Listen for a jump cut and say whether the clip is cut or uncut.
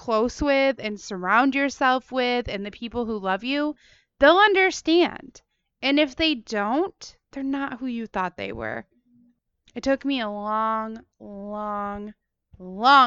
uncut